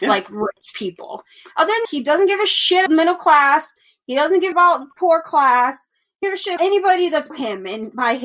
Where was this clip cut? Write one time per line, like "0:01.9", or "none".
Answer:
0:01.8
0:02.9
0:04.5
0:06.2
0:06.6
0:07.3